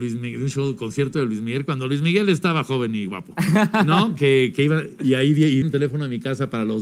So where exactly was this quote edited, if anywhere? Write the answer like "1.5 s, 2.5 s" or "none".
5.6 s